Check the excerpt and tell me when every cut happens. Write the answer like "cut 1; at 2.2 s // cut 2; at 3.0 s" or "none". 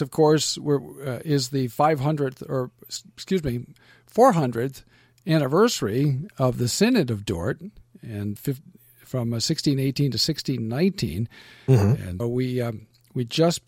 cut 1; at 8.4 s // cut 2; at 12.2 s